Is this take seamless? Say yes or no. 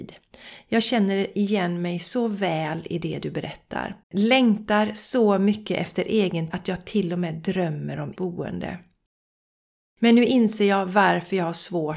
no